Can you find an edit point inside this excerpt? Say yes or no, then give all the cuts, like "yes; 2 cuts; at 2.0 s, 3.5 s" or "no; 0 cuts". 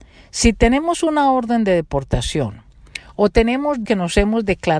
yes; 1 cut; at 3.8 s